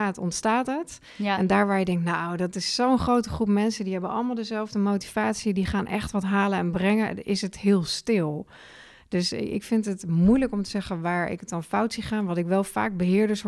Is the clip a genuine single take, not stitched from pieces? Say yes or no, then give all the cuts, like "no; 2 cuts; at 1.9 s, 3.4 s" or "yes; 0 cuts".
yes; 0 cuts